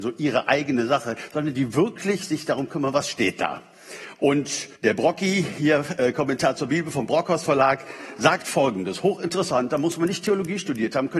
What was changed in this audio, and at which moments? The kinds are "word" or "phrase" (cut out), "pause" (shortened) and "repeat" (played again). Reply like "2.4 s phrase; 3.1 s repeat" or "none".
4.8 s pause

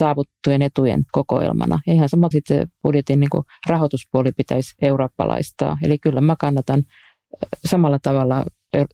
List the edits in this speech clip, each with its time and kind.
1.1 s pause; 2.3 s word

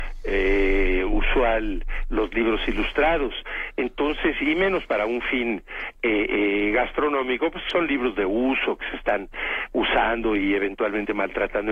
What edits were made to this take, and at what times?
none

